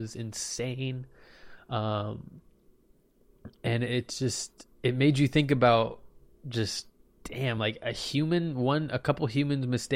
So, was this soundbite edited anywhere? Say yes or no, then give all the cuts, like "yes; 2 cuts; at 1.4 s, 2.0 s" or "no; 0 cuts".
no; 0 cuts